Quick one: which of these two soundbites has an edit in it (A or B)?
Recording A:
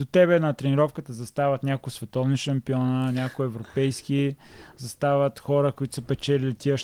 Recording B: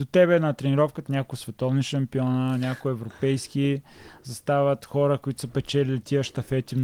B